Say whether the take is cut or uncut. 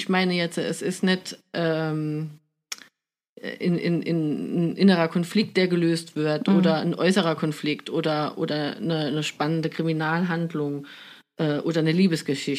uncut